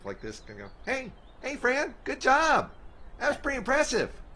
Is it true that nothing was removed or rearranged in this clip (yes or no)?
yes